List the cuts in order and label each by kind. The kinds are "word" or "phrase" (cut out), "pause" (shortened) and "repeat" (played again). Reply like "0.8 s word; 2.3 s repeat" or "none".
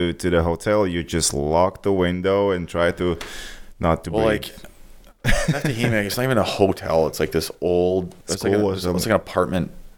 8.2 s pause